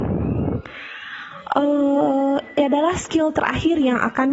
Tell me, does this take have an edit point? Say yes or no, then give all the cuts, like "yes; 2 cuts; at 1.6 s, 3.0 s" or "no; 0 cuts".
no; 0 cuts